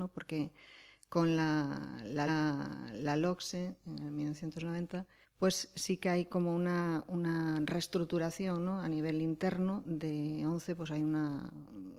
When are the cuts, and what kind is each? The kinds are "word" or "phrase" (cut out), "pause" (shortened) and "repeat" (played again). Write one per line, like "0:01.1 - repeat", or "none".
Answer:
0:02.3 - repeat
0:05.2 - pause